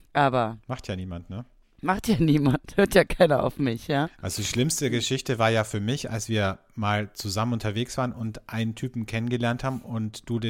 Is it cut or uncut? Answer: uncut